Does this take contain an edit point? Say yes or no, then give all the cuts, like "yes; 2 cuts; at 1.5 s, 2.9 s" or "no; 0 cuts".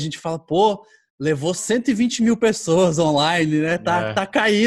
yes; 1 cut; at 1.6 s